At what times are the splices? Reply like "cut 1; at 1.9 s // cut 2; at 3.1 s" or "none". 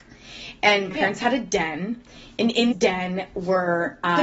cut 1; at 0.9 s // cut 2; at 2.7 s